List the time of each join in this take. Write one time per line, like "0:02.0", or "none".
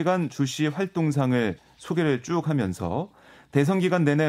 none